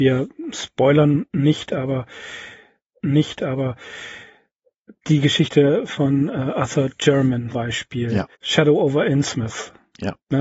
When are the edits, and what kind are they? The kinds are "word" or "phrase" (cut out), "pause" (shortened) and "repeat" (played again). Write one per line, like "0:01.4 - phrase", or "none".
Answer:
0:03.0 - repeat
0:07.5 - word
0:08.3 - pause